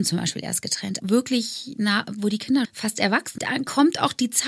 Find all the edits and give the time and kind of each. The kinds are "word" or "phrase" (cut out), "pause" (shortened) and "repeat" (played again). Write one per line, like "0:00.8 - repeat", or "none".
0:01.0 - word
0:02.6 - word
0:03.4 - phrase